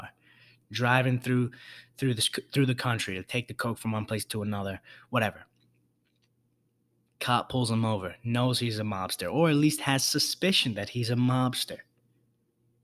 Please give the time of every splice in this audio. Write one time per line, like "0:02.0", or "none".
none